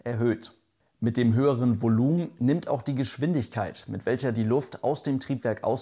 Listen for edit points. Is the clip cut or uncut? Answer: uncut